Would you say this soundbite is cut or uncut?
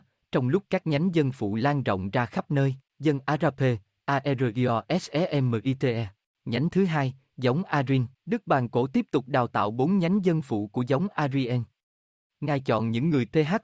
cut